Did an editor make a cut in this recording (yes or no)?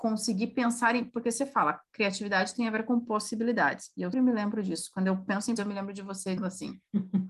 yes